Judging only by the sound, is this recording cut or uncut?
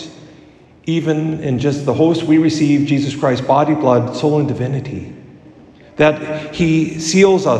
uncut